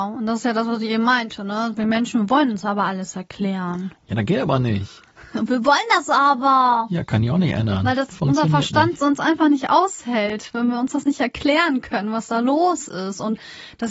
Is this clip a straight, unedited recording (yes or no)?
yes